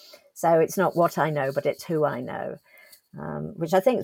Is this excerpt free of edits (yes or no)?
yes